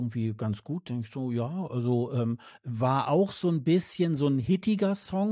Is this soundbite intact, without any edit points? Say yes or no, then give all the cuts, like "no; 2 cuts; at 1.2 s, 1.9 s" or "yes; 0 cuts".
yes; 0 cuts